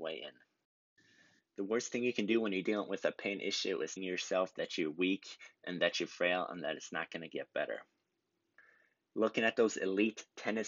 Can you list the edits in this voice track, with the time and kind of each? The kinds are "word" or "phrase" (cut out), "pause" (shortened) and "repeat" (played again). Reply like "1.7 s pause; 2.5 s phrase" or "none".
4.0 s word